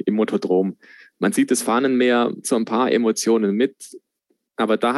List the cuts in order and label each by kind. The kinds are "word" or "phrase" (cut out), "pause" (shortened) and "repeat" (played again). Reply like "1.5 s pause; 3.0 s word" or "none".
2.4 s phrase